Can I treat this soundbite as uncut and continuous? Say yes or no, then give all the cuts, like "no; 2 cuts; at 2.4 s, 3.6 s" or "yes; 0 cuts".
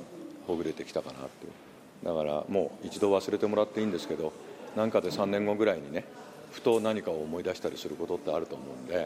yes; 0 cuts